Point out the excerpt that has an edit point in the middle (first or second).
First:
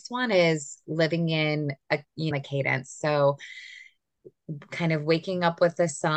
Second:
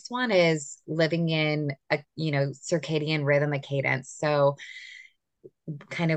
first